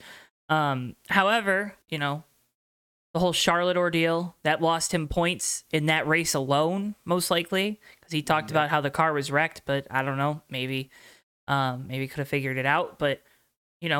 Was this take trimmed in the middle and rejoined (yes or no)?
yes